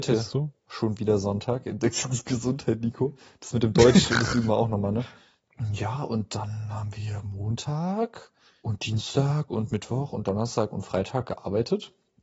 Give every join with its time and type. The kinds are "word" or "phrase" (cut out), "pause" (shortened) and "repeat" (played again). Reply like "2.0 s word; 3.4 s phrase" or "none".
none

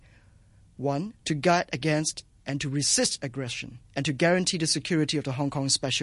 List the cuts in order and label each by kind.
1.2 s pause; 3.9 s pause

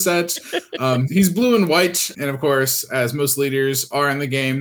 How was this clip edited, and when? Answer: 1.1 s word; 2.1 s word

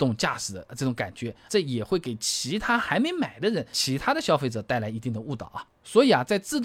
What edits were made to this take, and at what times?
1.5 s word; 3.7 s word

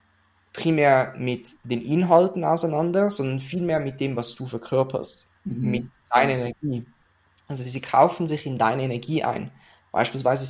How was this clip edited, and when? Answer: none

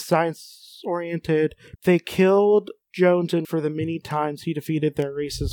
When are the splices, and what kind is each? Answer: 1.8 s phrase; 2.8 s pause; 3.4 s word

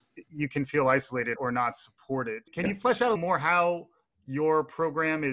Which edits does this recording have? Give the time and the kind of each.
1.4 s word; 3.2 s word

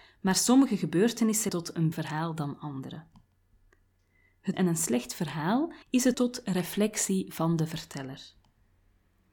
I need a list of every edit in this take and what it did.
1.5 s word; 1.9 s word; 4.5 s phrase; 5.8 s pause; 6.1 s word

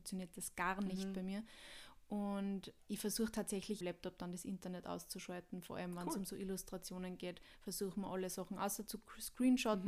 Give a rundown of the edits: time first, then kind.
3.8 s phrase

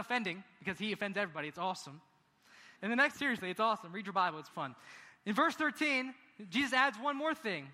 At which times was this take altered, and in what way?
2.7 s pause; 3.1 s word; 4.5 s word

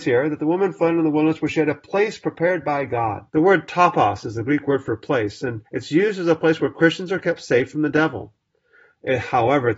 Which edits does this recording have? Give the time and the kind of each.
3.3 s pause; 5.7 s pause

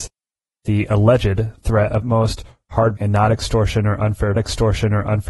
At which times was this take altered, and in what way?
2.0 s phrase; 3.0 s word; 4.4 s repeat

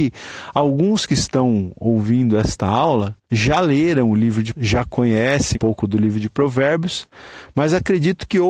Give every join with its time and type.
3.2 s pause; 4.5 s word; 5.5 s word

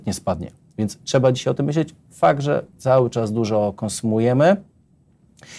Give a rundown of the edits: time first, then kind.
2.8 s word

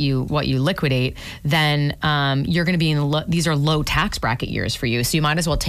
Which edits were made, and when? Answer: none

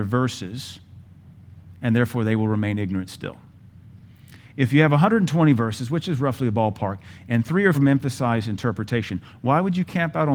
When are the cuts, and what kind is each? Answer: 7.7 s word

